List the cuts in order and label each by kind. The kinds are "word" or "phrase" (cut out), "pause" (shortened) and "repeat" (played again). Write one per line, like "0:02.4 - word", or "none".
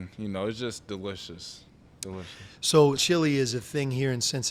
0:03.0 - word